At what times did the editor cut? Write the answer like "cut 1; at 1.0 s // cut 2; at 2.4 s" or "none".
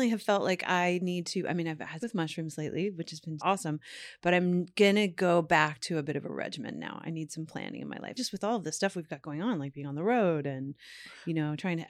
cut 1; at 2.0 s // cut 2; at 3.4 s // cut 3; at 8.2 s